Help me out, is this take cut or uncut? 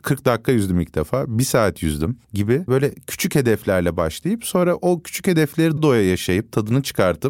cut